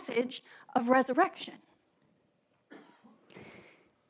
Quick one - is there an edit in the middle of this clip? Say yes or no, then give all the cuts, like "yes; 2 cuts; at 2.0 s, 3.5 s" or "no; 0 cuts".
no; 0 cuts